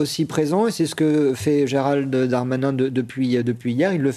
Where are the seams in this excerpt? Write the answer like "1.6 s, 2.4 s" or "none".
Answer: none